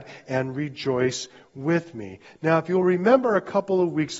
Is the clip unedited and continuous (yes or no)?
yes